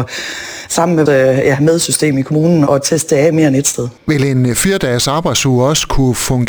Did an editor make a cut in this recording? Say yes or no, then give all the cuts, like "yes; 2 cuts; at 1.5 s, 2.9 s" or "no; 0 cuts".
yes; 3 cuts; at 1.1 s, 2.7 s, 4.0 s